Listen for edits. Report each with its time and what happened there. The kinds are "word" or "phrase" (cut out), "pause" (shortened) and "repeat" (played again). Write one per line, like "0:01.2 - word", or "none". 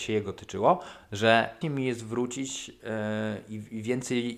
0:01.6 - word